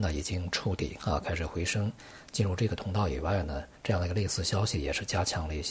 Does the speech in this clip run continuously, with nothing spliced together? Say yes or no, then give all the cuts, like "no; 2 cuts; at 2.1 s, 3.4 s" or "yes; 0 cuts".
no; 1 cut; at 3.8 s